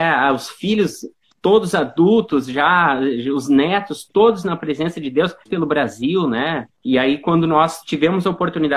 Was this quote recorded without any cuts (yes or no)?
no